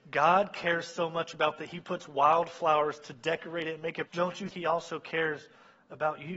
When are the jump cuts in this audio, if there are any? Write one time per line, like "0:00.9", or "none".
0:01.6
0:04.1
0:04.5